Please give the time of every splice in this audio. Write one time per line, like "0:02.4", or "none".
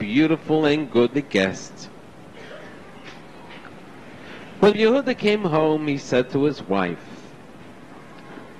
0:01.1
0:04.7